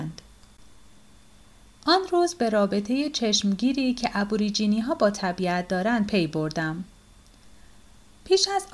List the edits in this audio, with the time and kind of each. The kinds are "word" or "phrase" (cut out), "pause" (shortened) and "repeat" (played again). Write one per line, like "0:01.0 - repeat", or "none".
none